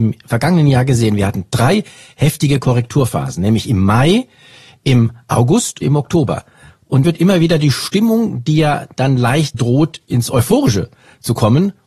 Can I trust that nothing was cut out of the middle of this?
no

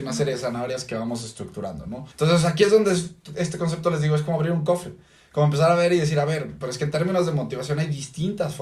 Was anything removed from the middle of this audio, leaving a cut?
yes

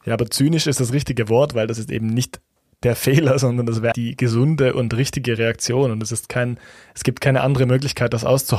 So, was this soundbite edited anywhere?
yes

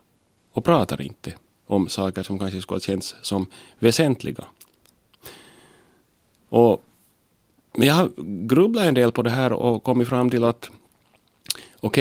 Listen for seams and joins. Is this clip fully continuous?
yes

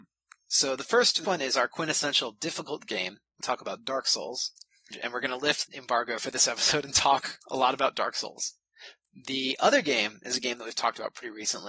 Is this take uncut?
no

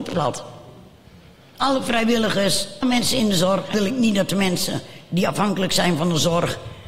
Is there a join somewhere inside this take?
yes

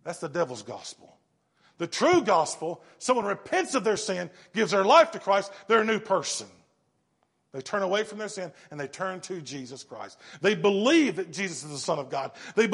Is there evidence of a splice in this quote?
no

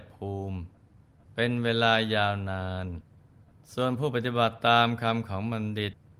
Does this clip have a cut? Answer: yes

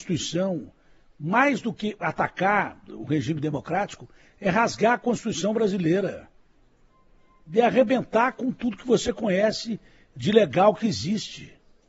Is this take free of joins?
yes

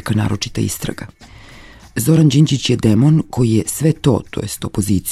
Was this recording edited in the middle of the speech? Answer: no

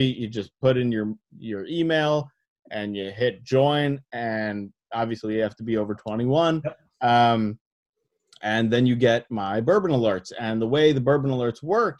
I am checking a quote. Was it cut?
no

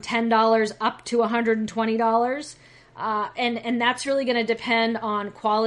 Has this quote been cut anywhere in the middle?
no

